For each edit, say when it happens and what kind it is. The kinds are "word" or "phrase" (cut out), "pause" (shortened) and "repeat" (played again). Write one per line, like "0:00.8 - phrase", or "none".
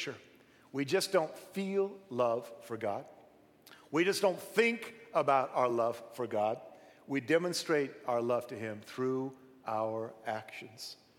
none